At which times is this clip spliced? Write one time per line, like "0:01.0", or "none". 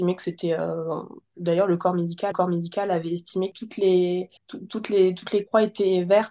0:02.3
0:03.5
0:04.4

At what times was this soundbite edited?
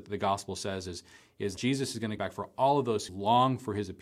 0:01.6
0:02.2
0:03.1

